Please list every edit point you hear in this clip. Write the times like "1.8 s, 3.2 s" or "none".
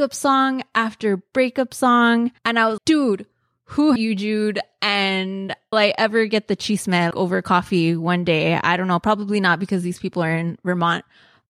2.4 s, 2.8 s, 4.0 s, 5.7 s, 7.1 s